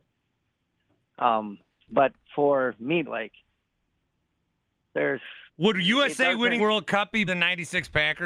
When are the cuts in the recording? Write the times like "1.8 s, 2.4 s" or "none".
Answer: 1.8 s, 3.1 s, 5.5 s, 6.6 s, 7.3 s